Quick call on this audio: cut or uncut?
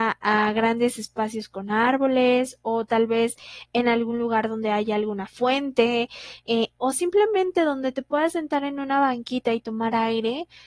uncut